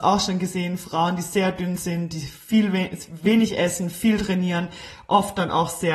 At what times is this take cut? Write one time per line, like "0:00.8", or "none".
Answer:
none